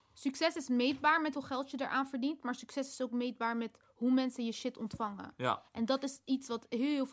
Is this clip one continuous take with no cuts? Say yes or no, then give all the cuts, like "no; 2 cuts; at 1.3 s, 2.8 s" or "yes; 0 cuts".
no; 1 cut; at 1.3 s